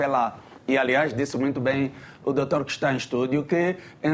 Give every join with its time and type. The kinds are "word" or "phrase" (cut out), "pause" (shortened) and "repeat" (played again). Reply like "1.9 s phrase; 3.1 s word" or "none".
none